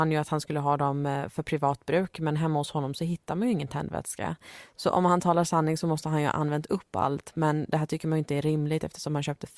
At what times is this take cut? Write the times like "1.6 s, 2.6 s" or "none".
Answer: none